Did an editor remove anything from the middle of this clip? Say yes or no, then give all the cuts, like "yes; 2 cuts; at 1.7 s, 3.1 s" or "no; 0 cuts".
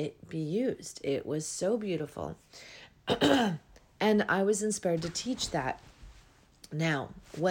no; 0 cuts